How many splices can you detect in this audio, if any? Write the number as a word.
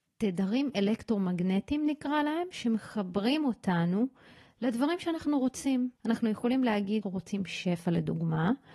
two